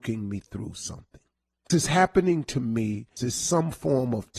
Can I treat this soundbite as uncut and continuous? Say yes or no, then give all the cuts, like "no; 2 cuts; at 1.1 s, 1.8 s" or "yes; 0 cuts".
no; 2 cuts; at 1.7 s, 3.2 s